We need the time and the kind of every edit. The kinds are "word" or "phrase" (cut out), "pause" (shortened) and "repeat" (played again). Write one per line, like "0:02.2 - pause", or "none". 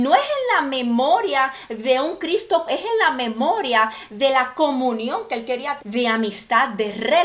0:02.7 - word
0:05.8 - word